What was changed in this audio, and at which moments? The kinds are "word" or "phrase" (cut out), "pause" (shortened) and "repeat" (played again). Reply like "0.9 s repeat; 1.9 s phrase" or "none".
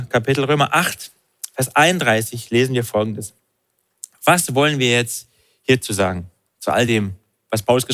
none

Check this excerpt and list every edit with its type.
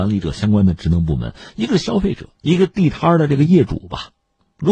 2.3 s pause

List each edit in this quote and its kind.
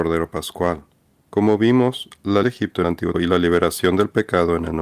2.4 s word; 2.8 s word; 3.1 s word

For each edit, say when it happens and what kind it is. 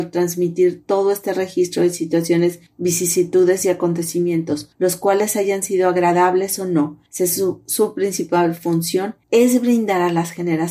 2.7 s pause; 4.7 s pause; 7.1 s pause; 9.2 s pause

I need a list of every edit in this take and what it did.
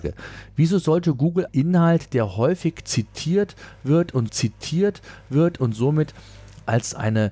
1.5 s word; 4.3 s repeat

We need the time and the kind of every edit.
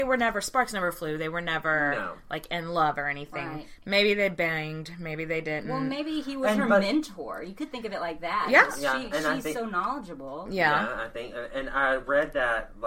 none

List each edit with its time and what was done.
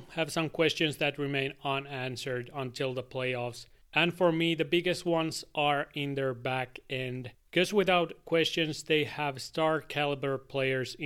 3.8 s pause

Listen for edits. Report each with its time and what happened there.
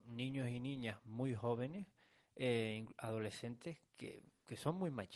none

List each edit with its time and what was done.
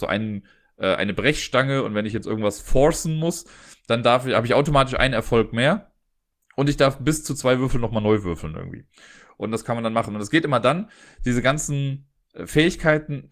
none

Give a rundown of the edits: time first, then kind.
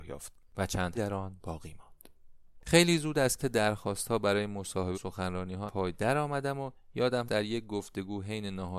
1.0 s word; 3.4 s word; 4.9 s word; 5.7 s word; 7.3 s word

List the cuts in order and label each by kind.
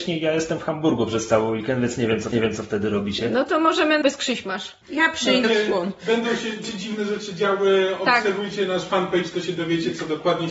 2.3 s repeat; 4.0 s word; 4.8 s pause; 5.4 s phrase; 6.6 s word

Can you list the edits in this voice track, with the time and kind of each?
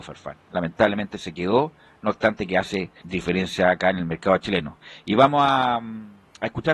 3.0 s word

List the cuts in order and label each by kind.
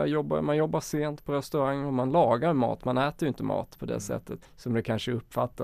4.4 s word

